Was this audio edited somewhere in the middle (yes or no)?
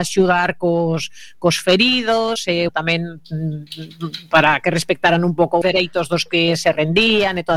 yes